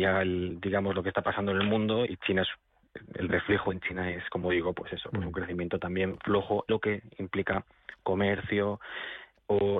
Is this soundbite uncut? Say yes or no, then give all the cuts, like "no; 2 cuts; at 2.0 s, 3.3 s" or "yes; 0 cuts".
no; 2 cuts; at 2.1 s, 6.7 s